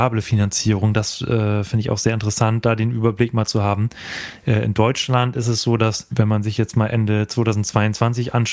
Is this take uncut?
yes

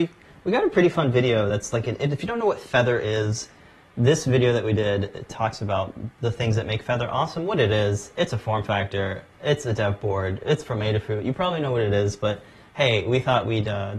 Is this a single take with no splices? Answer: yes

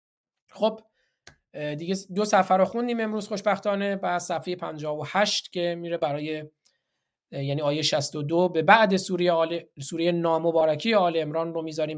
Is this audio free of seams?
yes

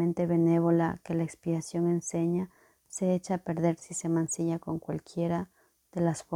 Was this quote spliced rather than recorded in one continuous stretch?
no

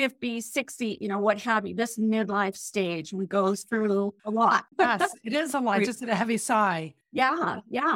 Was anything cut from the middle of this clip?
yes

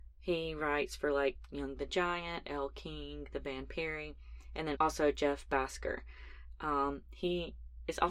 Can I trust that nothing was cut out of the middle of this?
no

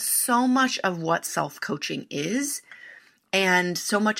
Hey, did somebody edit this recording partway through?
no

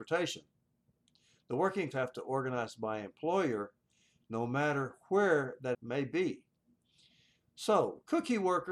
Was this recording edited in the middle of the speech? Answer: yes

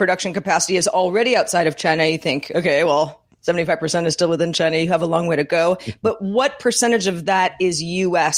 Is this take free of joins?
yes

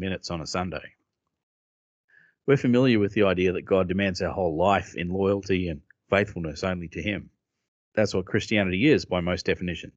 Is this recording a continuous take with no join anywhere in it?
no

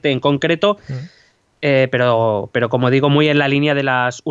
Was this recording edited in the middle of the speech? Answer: no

